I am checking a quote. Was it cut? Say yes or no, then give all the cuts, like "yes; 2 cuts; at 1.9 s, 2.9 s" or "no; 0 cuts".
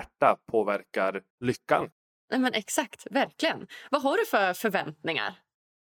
no; 0 cuts